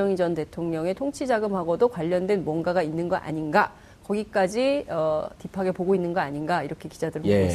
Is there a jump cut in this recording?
no; 0 cuts

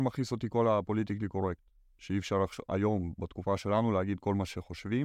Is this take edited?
no; 0 cuts

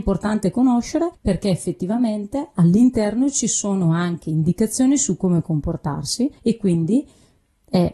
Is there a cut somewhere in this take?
yes; 2 cuts; at 1.1 s, 6.4 s

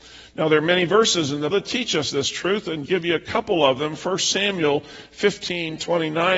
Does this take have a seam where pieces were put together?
yes; 2 cuts; at 1.5 s, 2.9 s

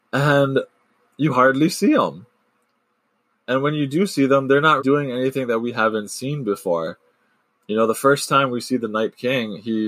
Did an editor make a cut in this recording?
yes; 1 cut; at 4.8 s

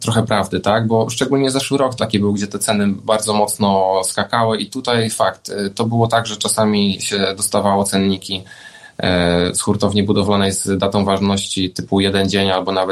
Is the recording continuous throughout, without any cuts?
yes; 0 cuts

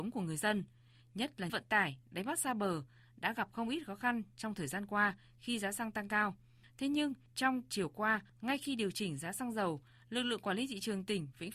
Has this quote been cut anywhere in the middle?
yes; 1 cut; at 1.5 s

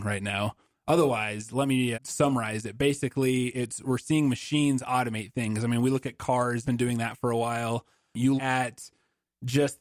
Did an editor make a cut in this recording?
yes; 4 cuts; at 1.9 s, 3.8 s, 6.6 s, 8.4 s

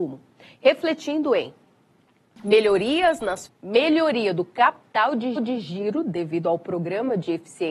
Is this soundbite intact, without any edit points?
no; 2 cuts; at 3.5 s, 5.4 s

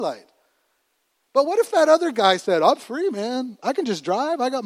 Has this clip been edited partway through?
no; 0 cuts

